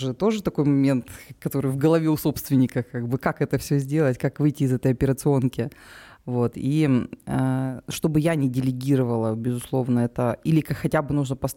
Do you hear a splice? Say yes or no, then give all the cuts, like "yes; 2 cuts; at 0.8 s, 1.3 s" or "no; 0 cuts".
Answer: no; 0 cuts